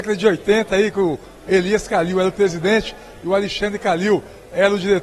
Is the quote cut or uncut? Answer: uncut